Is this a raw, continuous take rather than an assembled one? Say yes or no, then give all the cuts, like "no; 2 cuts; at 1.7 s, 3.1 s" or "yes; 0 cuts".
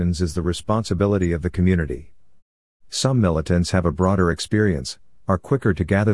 yes; 0 cuts